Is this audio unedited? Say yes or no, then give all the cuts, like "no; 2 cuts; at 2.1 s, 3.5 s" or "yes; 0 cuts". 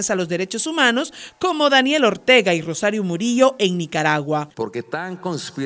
yes; 0 cuts